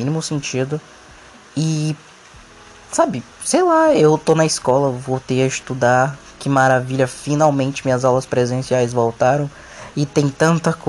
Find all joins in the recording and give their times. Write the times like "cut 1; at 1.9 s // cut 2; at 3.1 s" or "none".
cut 1; at 3.3 s